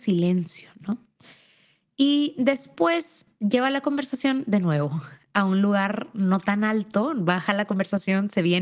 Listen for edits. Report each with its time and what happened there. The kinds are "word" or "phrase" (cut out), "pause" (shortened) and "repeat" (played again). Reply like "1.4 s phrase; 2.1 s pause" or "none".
none